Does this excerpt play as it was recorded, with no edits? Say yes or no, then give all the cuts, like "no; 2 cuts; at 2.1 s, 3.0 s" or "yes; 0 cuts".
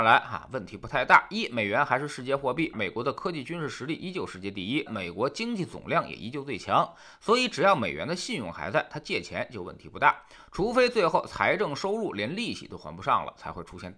no; 2 cuts; at 2.7 s, 4.9 s